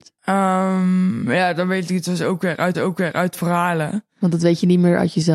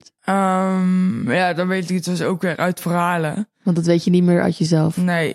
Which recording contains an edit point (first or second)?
first